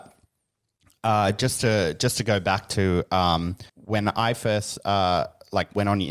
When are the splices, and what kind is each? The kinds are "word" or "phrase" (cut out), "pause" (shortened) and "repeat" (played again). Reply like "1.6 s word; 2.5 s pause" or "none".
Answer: 3.7 s pause